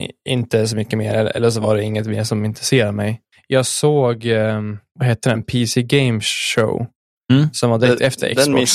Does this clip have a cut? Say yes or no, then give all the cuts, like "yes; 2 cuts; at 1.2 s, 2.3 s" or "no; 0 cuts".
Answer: no; 0 cuts